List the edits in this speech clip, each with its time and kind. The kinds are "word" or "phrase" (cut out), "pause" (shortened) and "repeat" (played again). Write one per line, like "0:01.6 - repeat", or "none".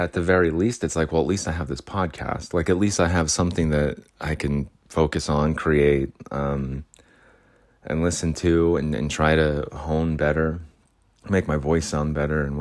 none